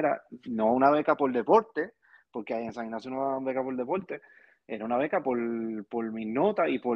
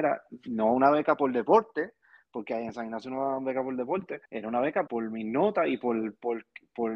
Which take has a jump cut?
second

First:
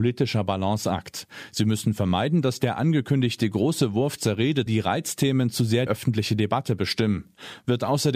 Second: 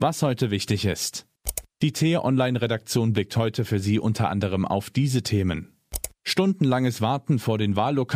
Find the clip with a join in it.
first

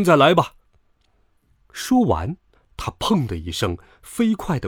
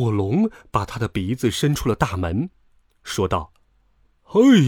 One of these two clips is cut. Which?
first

